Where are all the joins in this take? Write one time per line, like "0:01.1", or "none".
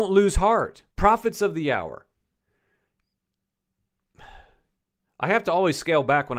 0:00.9

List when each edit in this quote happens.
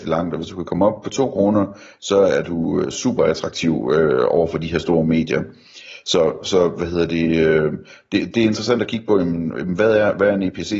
none

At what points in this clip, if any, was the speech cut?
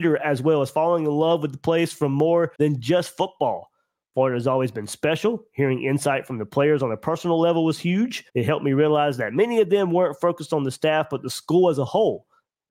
0:02.5
0:08.3

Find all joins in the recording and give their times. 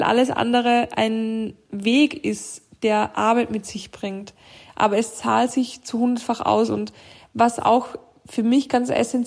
none

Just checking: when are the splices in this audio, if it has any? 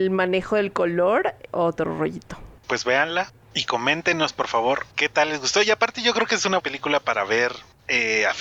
0:01.5
0:02.6
0:03.4
0:04.9
0:06.6

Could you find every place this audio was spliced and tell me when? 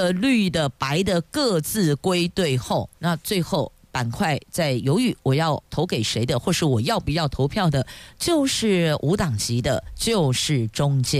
0:03.0
0:05.7

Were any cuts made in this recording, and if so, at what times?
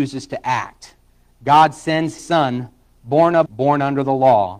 0:02.2
0:03.5

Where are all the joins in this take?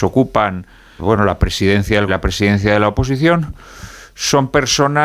0:01.0
0:02.1

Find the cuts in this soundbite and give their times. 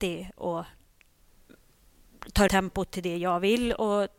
0:02.5

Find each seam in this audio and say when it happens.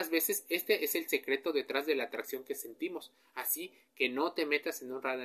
none

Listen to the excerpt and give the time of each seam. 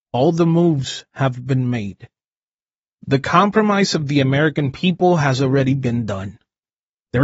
none

